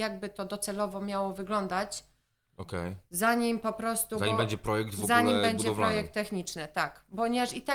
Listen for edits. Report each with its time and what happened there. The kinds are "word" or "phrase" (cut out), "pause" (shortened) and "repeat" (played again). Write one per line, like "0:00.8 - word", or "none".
none

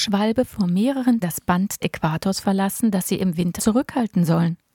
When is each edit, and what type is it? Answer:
0:01.2 - word
0:01.8 - word
0:03.6 - word

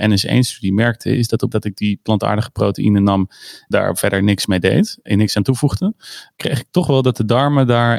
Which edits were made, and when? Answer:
0:01.5 - word
0:03.7 - word
0:05.1 - word
0:06.4 - word

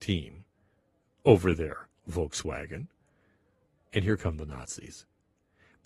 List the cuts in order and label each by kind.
none

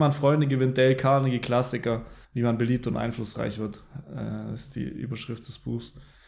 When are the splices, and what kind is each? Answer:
0:02.2 - pause

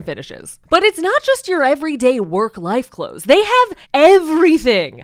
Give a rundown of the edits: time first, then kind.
0:03.8 - pause

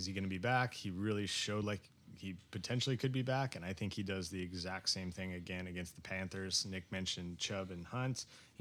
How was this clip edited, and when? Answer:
none

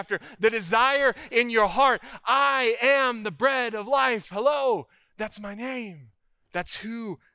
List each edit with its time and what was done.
none

